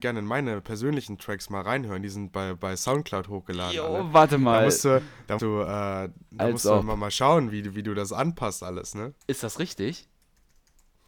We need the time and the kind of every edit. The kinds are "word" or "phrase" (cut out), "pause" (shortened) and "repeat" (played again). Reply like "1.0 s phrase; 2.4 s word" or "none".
5.4 s word; 9.2 s pause